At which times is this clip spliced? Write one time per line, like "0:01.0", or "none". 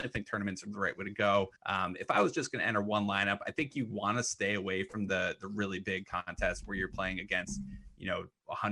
0:01.6